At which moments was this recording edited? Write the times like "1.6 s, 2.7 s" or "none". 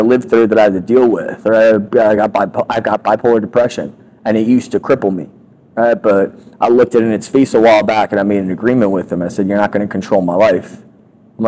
none